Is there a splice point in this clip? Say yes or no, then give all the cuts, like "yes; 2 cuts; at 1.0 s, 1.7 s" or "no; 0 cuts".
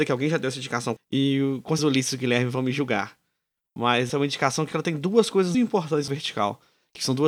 yes; 6 cuts; at 1.0 s, 1.8 s, 4.1 s, 4.7 s, 5.5 s, 6.1 s